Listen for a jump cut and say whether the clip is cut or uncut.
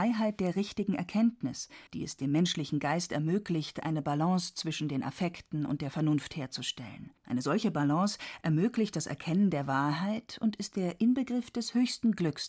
cut